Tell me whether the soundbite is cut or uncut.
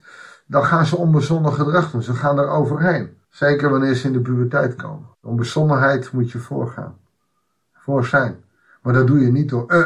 cut